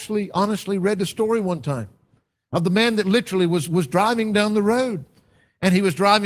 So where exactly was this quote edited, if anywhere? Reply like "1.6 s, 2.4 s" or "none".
none